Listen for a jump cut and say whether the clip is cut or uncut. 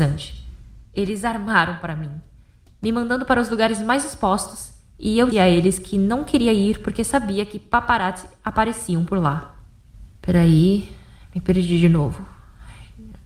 cut